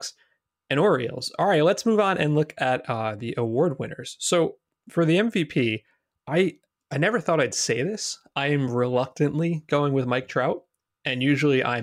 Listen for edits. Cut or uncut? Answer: uncut